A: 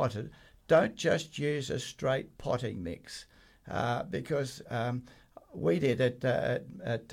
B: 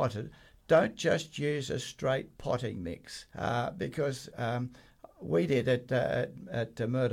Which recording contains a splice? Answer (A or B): B